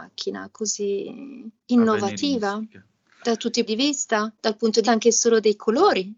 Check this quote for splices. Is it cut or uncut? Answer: cut